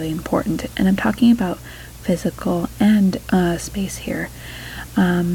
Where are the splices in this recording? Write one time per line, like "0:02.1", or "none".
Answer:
0:03.2